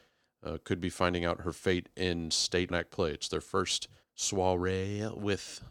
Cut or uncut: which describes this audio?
cut